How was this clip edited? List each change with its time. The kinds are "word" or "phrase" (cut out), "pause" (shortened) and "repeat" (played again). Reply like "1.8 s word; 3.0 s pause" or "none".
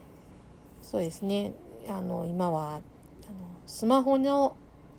none